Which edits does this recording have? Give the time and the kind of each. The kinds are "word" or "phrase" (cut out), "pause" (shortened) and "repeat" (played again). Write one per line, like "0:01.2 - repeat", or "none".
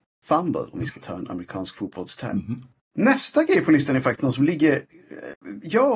0:02.8 - pause